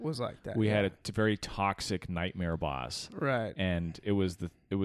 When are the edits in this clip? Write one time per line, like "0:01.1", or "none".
none